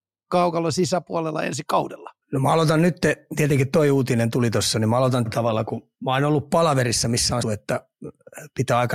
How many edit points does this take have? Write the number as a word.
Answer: four